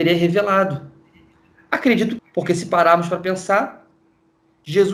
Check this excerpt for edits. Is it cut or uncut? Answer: cut